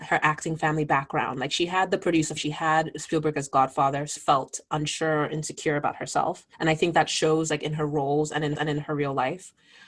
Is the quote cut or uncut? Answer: cut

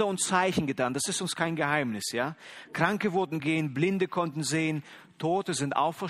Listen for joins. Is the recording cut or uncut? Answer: cut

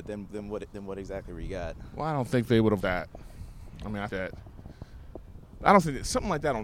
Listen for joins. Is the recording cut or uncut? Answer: cut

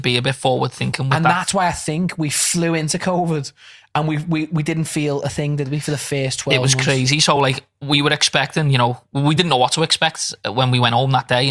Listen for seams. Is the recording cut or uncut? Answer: uncut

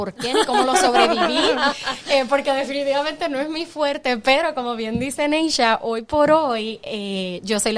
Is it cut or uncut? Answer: uncut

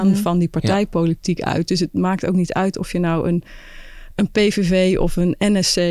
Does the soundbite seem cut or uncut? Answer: uncut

